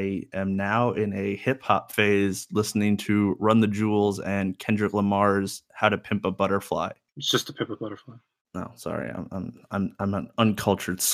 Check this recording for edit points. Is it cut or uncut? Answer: uncut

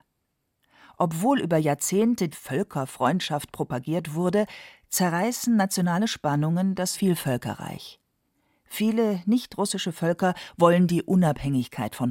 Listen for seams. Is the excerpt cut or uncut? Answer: cut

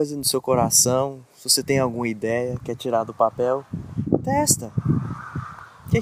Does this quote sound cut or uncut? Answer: uncut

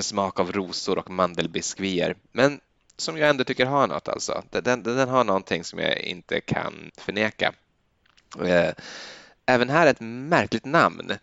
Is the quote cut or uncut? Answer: cut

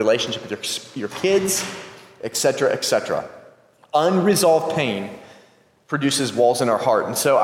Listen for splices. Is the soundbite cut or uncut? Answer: uncut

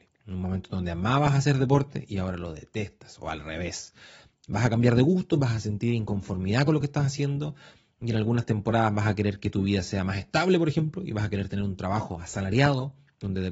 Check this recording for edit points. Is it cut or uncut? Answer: uncut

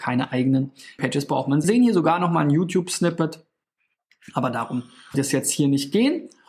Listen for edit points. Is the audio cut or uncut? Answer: cut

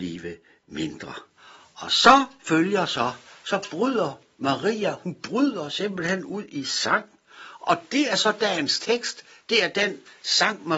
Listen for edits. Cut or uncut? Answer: uncut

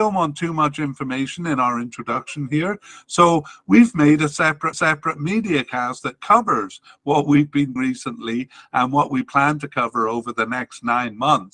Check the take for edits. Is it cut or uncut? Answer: cut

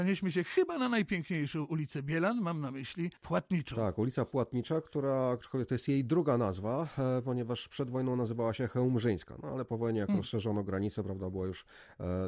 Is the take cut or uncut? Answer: cut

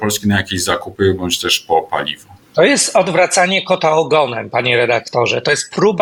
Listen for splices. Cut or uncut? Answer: cut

